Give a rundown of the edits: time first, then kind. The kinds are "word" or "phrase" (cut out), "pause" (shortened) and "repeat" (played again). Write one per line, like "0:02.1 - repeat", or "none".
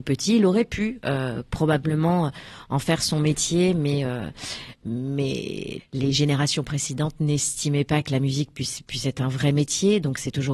0:05.8 - word